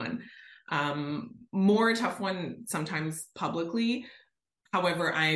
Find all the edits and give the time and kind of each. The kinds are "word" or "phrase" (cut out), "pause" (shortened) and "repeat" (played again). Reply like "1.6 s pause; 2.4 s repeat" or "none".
none